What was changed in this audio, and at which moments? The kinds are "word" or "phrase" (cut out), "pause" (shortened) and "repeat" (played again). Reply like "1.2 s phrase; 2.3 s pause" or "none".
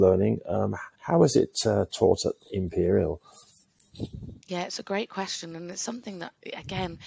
0.9 s pause; 4.4 s pause